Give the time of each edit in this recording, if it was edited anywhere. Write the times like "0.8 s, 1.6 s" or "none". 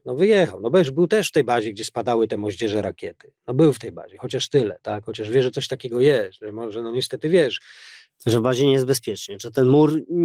none